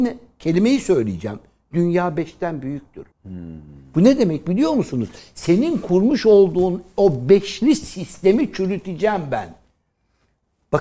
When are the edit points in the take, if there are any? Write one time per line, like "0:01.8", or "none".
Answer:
0:03.1